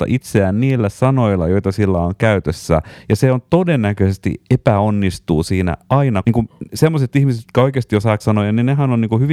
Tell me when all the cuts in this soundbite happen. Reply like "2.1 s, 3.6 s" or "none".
6.2 s, 8.2 s